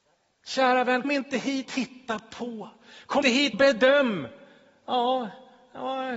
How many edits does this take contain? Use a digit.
4